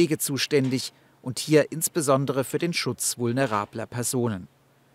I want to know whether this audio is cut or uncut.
uncut